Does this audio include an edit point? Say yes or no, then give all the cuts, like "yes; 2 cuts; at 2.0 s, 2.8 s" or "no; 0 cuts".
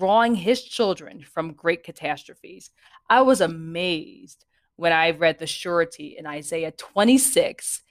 no; 0 cuts